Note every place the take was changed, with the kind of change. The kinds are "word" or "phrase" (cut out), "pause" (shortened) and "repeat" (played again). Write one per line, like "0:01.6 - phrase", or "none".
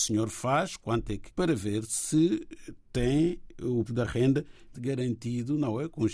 0:01.3 - word
0:03.9 - word
0:04.7 - word